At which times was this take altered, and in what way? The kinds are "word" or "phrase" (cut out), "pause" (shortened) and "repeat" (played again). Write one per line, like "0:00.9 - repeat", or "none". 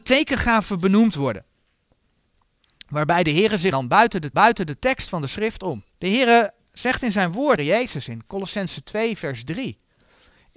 0:03.7 - phrase
0:04.3 - repeat
0:05.9 - pause
0:07.6 - phrase